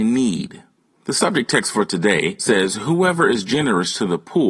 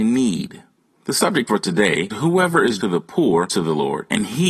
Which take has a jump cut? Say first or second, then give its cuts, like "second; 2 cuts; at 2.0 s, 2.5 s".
second; 4 cuts; at 1.5 s, 2.1 s, 2.8 s, 3.5 s